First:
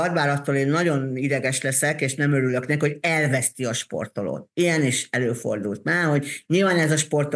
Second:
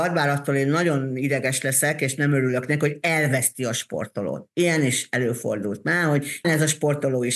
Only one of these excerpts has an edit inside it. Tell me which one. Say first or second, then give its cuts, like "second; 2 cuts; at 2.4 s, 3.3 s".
second; 1 cut; at 6.4 s